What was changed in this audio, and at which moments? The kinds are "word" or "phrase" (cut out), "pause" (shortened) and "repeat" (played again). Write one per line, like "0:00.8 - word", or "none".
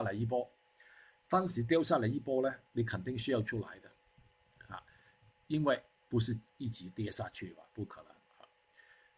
0:02.7 - pause
0:06.0 - pause
0:06.5 - pause